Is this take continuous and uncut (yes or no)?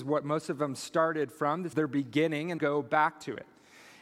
no